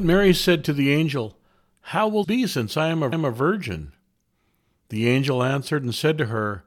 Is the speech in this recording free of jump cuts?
no; 2 cuts; at 2.2 s, 3.1 s

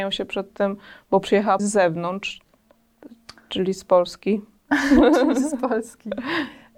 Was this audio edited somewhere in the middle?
yes; 1 cut; at 1.6 s

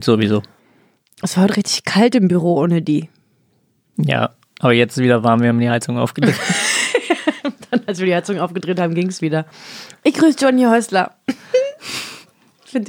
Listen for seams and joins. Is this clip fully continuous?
yes; 0 cuts

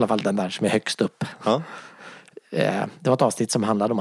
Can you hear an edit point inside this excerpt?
no; 0 cuts

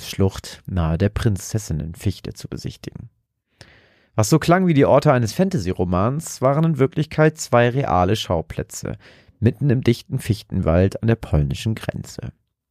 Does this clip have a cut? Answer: no; 0 cuts

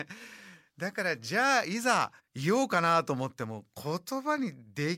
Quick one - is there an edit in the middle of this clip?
yes; 1 cut; at 2.2 s

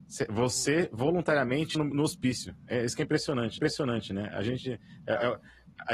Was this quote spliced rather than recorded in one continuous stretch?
yes; 2 cuts; at 1.7 s, 3.6 s

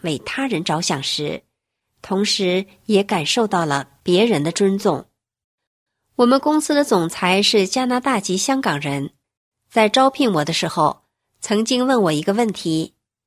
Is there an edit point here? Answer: no; 0 cuts

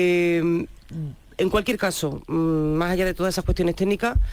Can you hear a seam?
no; 0 cuts

